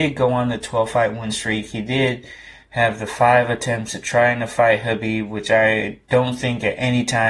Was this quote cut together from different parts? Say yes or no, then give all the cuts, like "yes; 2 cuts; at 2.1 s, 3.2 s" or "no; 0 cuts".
no; 0 cuts